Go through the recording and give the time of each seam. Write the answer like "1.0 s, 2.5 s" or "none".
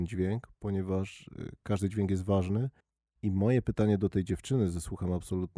2.8 s